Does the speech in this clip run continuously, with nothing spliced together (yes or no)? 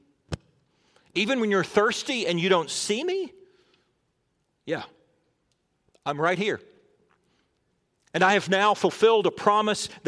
yes